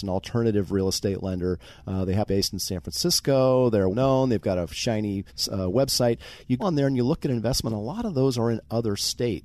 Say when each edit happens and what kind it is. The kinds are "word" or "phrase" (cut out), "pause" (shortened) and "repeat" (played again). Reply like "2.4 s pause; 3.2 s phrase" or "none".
2.3 s phrase; 3.9 s word; 5.3 s pause; 6.6 s word; 7.7 s word

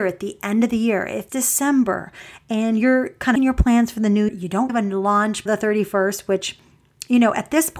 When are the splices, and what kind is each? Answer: 1.3 s word; 3.4 s word; 4.3 s word; 4.7 s word; 5.5 s word

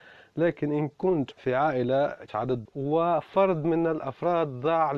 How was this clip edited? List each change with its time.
1.3 s word; 2.3 s word; 2.6 s word

